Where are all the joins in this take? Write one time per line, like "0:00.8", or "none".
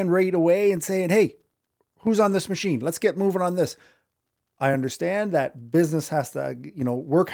none

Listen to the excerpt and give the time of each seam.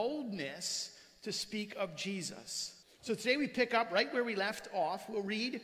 0:02.8

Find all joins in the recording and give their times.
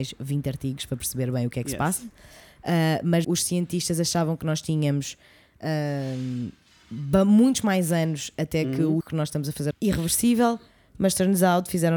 0:03.2
0:09.0
0:09.7

